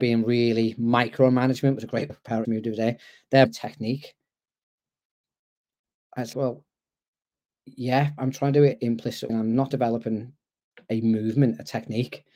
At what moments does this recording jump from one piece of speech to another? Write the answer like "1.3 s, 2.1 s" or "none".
2.1 s, 2.4 s, 3.4 s, 6.3 s, 8.2 s, 8.7 s, 9.3 s, 9.7 s